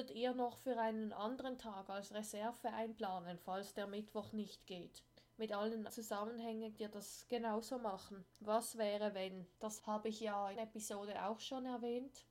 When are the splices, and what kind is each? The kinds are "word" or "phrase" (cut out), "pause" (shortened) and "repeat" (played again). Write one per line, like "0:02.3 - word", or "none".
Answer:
0:05.9 - word
0:06.8 - word
0:08.3 - pause
0:09.5 - pause
0:10.6 - phrase